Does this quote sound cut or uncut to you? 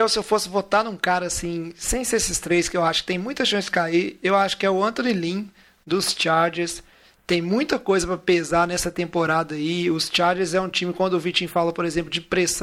uncut